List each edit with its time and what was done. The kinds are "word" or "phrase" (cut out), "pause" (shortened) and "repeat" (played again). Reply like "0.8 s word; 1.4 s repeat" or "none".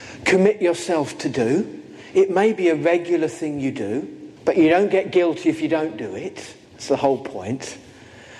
4.4 s pause; 6.6 s pause